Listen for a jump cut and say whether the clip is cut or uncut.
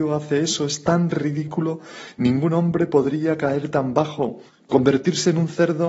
cut